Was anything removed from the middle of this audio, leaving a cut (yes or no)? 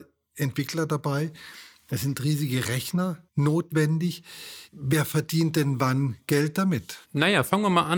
yes